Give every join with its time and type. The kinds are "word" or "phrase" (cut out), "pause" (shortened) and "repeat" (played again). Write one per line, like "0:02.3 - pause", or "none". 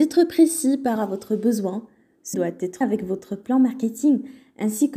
0:01.0 - word
0:02.3 - word
0:02.8 - word